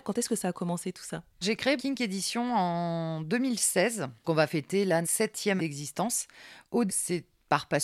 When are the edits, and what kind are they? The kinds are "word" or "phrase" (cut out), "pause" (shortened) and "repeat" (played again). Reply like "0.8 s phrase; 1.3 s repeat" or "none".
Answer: 1.4 s word; 1.8 s word; 4.2 s word; 5.0 s word; 5.6 s word; 6.9 s word